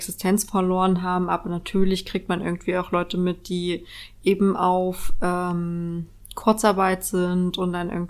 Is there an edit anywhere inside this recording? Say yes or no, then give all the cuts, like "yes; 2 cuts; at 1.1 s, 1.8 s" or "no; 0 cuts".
no; 0 cuts